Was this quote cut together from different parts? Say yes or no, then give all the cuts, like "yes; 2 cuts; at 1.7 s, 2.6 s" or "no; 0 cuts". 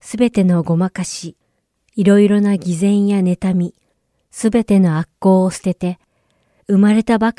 no; 0 cuts